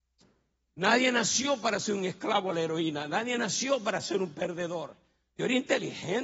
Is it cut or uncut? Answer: uncut